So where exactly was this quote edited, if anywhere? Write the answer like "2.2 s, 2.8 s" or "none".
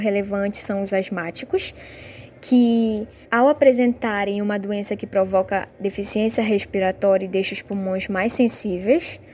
3.2 s